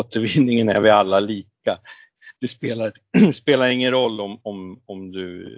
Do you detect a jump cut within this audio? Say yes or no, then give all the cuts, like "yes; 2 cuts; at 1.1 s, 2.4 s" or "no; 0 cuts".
no; 0 cuts